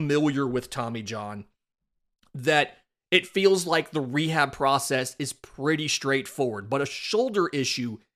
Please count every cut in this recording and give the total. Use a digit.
0